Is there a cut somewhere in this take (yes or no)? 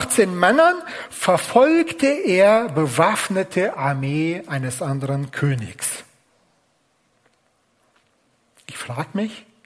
no